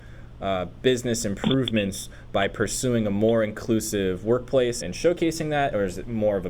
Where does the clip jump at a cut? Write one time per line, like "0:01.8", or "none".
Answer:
0:04.8